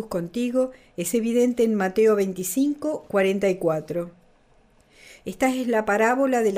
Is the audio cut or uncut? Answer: uncut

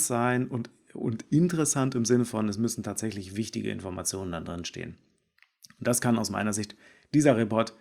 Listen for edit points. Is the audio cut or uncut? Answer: uncut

